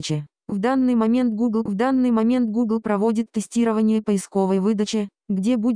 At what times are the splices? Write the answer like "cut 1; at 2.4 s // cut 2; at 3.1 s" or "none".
cut 1; at 1.7 s

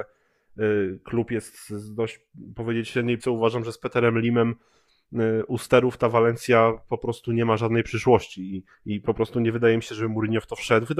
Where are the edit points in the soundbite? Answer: cut 1; at 3.2 s // cut 2; at 8.7 s

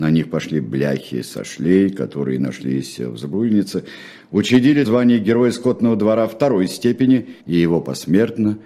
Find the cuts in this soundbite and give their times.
cut 1; at 4.8 s // cut 2; at 7.4 s

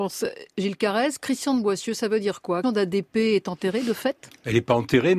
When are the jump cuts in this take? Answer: cut 1; at 2.6 s

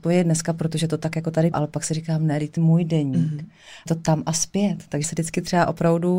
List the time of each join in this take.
cut 1; at 1.5 s // cut 2; at 2.6 s // cut 3; at 3.9 s // cut 4; at 5.0 s

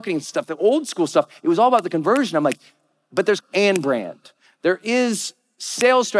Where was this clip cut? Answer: cut 1; at 3.4 s

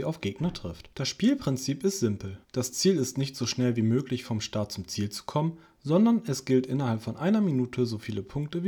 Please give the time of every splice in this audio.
cut 1; at 0.9 s // cut 2; at 2.4 s

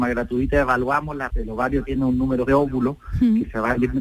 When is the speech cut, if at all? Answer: cut 1; at 1.3 s // cut 2; at 2.5 s

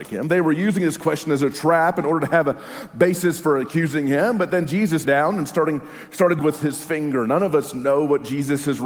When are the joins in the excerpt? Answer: cut 1; at 5.0 s // cut 2; at 6.4 s

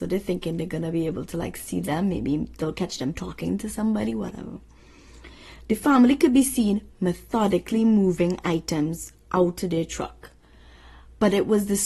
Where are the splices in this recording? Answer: none

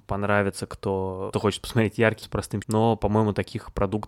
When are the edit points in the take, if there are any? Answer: cut 1; at 1.3 s // cut 2; at 2.2 s // cut 3; at 2.6 s

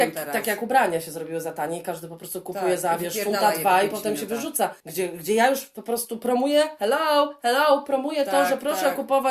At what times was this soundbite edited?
cut 1; at 4.8 s

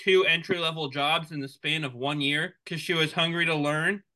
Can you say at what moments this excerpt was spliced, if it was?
cut 1; at 2.6 s

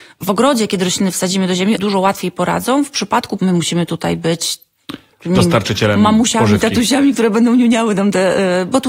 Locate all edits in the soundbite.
cut 1; at 1.8 s // cut 2; at 3.4 s

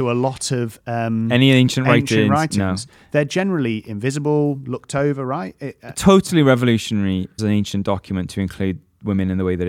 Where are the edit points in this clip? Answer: cut 1; at 7.4 s

